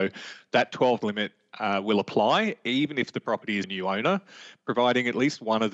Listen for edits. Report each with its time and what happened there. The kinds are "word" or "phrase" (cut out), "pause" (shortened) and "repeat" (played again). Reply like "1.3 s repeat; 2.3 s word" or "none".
1.0 s word; 3.6 s phrase